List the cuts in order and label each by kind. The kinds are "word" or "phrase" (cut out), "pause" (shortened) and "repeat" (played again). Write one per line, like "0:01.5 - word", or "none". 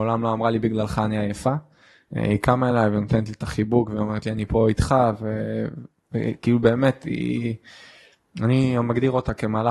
none